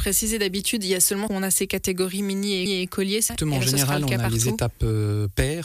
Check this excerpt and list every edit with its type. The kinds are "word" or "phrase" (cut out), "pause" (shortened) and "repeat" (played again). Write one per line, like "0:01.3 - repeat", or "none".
0:01.3 - phrase
0:02.7 - repeat
0:03.3 - word